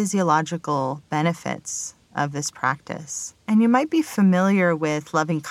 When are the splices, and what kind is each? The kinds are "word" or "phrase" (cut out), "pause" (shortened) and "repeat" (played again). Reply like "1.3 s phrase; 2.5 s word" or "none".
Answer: 3.4 s pause